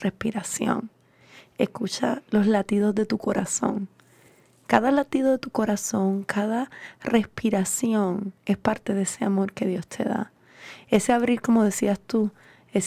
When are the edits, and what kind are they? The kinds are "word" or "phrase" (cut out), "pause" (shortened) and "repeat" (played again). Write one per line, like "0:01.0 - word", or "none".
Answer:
0:08.4 - pause

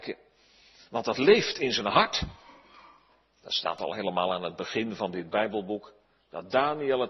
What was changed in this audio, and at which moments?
none

